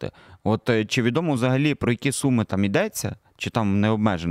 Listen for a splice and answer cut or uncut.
uncut